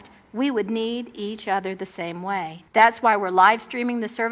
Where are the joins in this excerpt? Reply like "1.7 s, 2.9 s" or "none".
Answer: 2.7 s

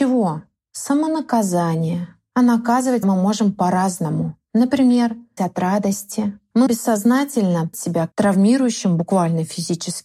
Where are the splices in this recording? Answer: 3.0 s, 5.4 s, 6.7 s, 7.7 s, 8.1 s

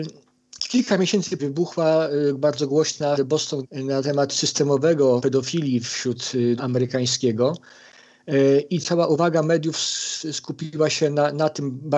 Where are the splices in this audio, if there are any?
1.4 s, 3.1 s, 3.6 s, 5.2 s, 6.6 s, 8.8 s

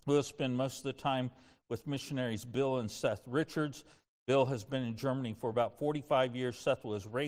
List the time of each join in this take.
none

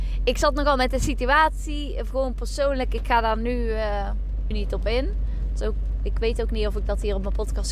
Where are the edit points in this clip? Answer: 4.5 s

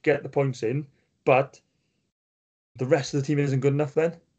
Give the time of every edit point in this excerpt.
2.8 s

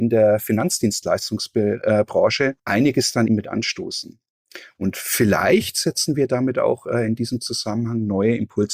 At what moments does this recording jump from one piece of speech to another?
2.6 s, 3.3 s

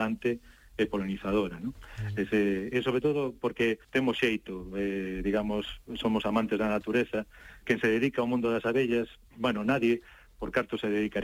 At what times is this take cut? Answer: 2.7 s, 3.8 s, 7.6 s

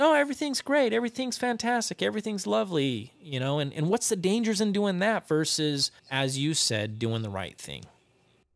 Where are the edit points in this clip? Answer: 6.0 s

